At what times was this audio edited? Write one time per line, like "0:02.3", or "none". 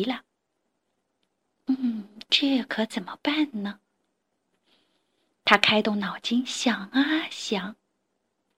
none